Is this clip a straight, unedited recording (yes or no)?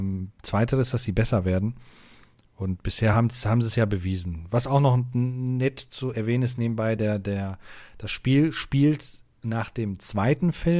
yes